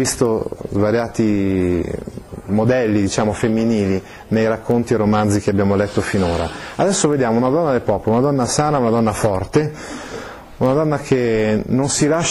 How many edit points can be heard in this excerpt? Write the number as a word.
zero